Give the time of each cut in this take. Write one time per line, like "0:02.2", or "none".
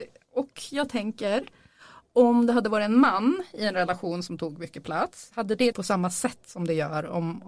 0:05.7